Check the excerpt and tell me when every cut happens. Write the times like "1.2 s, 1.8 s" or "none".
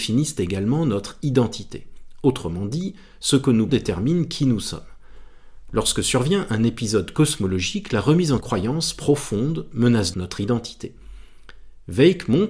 3.7 s, 8.4 s, 10.1 s